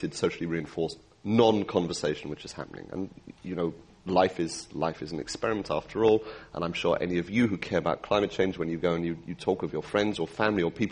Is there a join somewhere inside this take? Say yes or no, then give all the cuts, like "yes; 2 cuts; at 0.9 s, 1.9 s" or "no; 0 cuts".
no; 0 cuts